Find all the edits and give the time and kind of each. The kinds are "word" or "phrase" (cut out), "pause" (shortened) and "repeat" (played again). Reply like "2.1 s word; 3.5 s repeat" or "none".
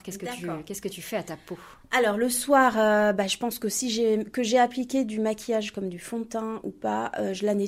none

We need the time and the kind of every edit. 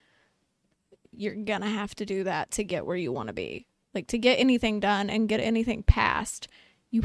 none

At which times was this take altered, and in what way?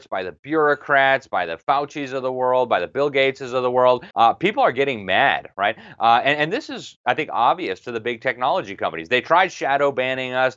4.1 s pause

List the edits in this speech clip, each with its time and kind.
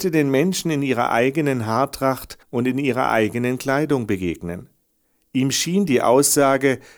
2.4 s pause

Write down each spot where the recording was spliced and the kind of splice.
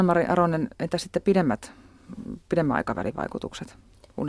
none

